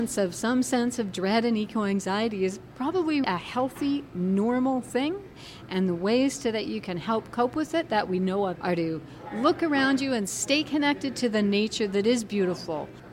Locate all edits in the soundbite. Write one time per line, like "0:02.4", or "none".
0:03.2
0:08.5

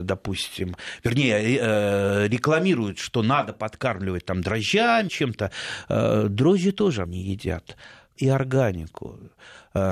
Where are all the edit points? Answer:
0:05.1
0:07.0
0:08.2

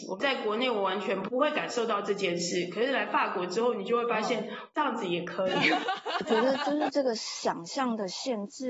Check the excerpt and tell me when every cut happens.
0:04.7

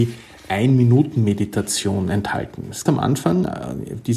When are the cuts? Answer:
0:02.9

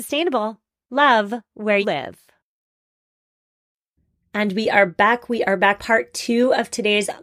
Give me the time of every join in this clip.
0:01.8
0:05.8

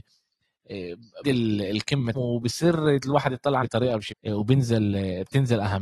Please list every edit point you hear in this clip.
0:01.2
0:02.1
0:03.6
0:04.1

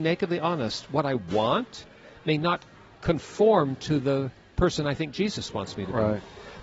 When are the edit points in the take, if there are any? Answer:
none

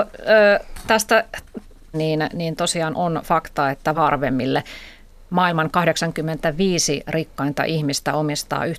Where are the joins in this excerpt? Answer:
0:01.9
0:03.9

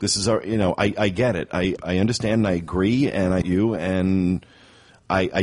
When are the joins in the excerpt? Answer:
0:01.8
0:03.4

